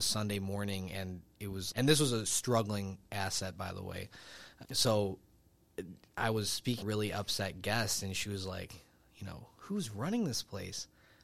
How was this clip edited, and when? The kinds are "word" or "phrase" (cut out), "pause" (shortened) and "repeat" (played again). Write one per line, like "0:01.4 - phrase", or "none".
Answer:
0:01.7 - word
0:04.6 - word
0:06.8 - phrase